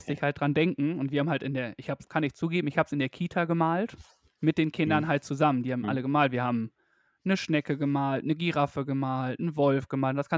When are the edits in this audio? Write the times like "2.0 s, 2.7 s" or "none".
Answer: 2.0 s